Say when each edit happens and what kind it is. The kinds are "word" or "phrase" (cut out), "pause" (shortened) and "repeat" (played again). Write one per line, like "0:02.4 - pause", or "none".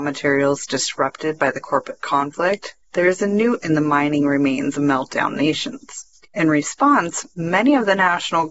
0:02.8 - pause
0:03.6 - word
0:04.7 - word
0:06.1 - pause